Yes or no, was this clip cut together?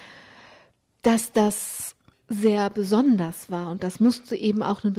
no